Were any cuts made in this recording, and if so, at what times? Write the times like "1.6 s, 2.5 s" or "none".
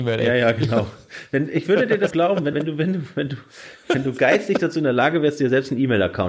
2.1 s, 2.5 s